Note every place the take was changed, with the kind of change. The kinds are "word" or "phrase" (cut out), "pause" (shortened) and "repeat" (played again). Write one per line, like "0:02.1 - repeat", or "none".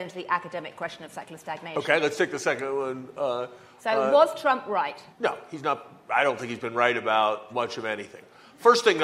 0:05.1 - pause
0:07.5 - word

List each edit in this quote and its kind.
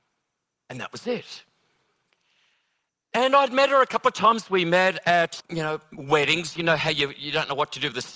0:05.4 - word

